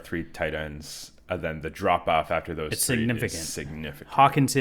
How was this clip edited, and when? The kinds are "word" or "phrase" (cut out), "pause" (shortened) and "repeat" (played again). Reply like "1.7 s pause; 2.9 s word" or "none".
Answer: none